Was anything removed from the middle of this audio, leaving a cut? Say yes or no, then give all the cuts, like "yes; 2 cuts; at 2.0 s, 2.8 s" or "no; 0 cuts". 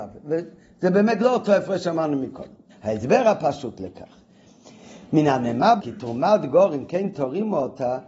yes; 2 cuts; at 2.7 s, 5.8 s